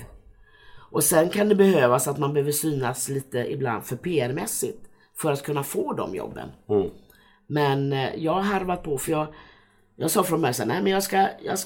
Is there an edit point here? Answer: no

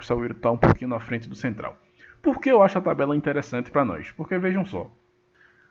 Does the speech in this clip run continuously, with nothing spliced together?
yes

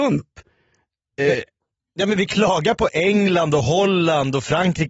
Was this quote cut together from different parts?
no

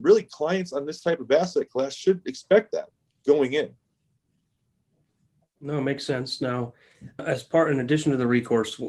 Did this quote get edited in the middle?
yes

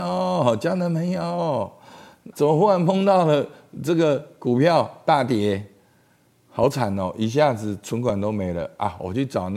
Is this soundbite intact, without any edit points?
no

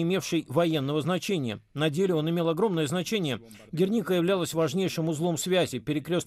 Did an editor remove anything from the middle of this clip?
no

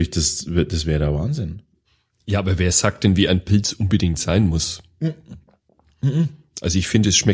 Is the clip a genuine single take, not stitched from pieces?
yes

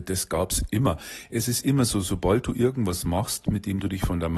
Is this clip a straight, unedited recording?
yes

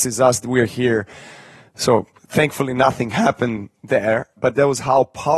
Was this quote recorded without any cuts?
yes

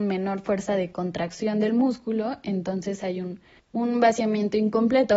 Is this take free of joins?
no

